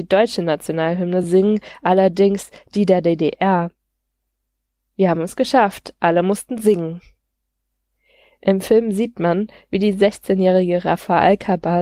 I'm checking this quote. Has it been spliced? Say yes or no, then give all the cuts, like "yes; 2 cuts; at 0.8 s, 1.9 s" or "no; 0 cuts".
no; 0 cuts